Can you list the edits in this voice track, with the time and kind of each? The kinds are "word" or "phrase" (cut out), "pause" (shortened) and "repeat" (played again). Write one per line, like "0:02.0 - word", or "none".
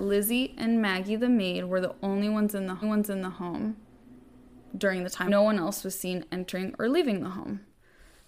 0:02.8 - repeat
0:05.3 - phrase